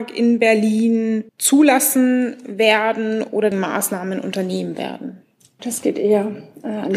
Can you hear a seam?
yes; 3 cuts; at 1.3 s, 3.5 s, 5.6 s

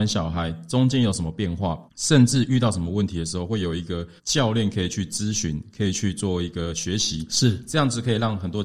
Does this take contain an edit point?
yes; 2 cuts; at 1.9 s, 4.2 s

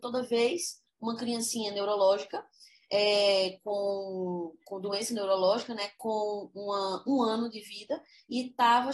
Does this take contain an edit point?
no; 0 cuts

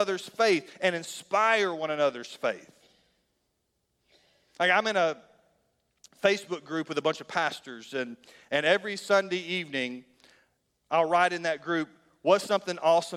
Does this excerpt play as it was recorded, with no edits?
yes; 0 cuts

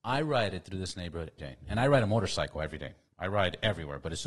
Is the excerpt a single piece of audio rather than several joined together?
no; 1 cut; at 1.4 s

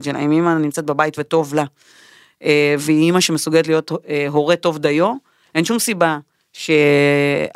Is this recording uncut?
yes; 0 cuts

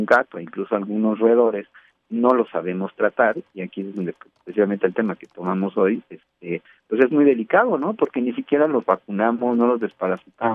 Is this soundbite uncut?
yes; 0 cuts

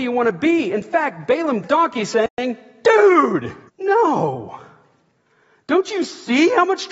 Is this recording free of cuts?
no; 2 cuts; at 1.6 s, 3.7 s

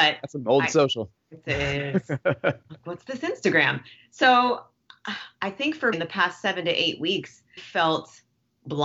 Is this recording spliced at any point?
yes; 3 cuts; at 2.8 s, 5.9 s, 7.6 s

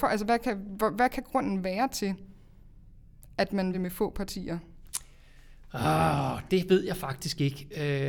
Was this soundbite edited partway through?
yes; 2 cuts; at 3.7 s, 6.5 s

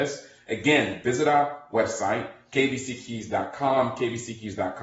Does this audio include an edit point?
no; 0 cuts

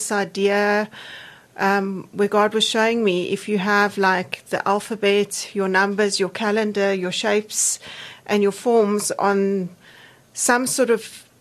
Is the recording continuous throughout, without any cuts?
yes; 0 cuts

